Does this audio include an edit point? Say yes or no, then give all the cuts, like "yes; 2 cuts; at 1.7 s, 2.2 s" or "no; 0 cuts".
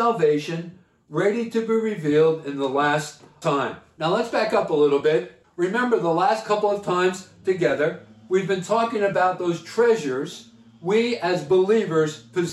no; 0 cuts